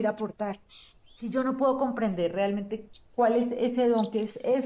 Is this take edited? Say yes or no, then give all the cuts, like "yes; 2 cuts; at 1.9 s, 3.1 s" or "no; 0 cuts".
no; 0 cuts